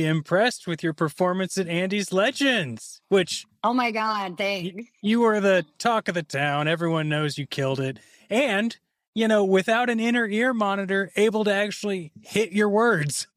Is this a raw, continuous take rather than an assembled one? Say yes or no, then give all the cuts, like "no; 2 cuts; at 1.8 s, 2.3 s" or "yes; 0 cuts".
yes; 0 cuts